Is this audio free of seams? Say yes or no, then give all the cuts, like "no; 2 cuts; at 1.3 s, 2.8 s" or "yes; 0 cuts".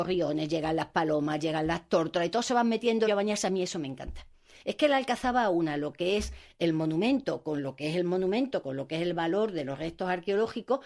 no; 1 cut; at 3.1 s